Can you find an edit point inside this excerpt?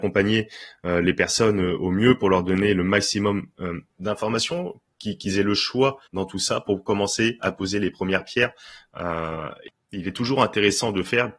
yes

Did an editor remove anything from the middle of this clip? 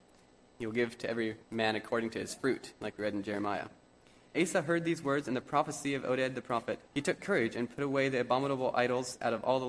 yes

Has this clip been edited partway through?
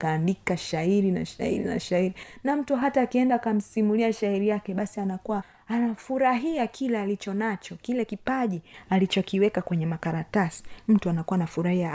no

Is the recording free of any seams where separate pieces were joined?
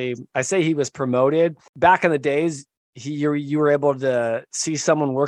yes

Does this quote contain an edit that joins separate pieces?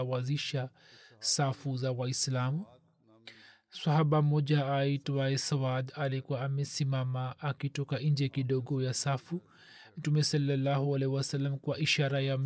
no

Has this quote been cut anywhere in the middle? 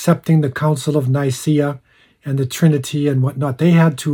no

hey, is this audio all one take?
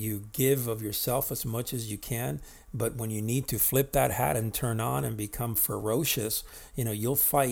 yes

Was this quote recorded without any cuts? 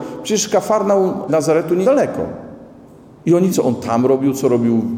no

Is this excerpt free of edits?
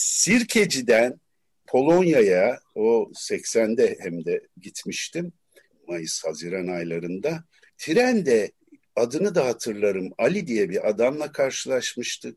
yes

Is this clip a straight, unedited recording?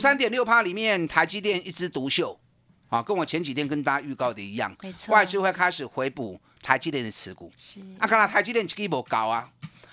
yes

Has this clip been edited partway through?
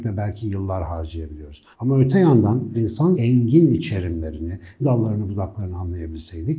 yes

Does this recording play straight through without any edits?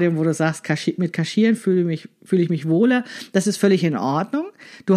yes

